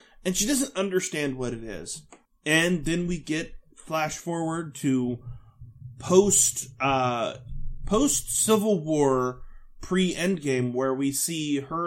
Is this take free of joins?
no; 1 cut; at 2.3 s

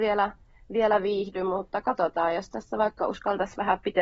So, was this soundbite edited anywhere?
no; 0 cuts

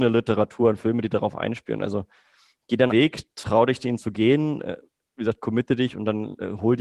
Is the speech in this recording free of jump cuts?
no; 1 cut; at 2.9 s

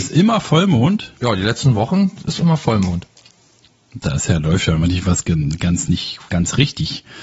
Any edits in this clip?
yes; 1 cut; at 6.3 s

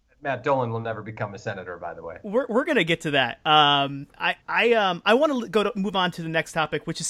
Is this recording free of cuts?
no; 1 cut; at 4.4 s

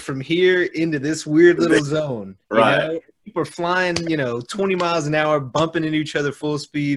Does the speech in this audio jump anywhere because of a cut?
yes; 1 cut; at 2.4 s

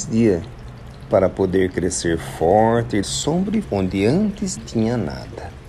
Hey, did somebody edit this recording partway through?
yes; 3 cuts; at 3.0 s, 3.6 s, 4.6 s

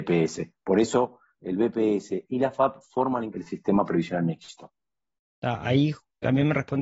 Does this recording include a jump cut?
yes; 1 cut; at 3.3 s

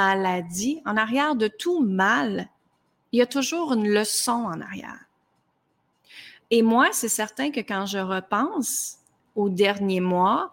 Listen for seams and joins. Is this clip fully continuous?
yes; 0 cuts

